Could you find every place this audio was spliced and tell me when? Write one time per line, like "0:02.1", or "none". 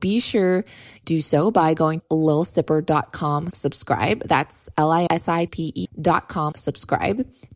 0:01.0
0:02.0
0:03.5
0:05.1
0:05.5
0:05.8
0:06.5